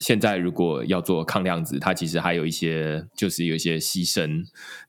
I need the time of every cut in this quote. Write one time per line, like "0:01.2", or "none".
0:03.1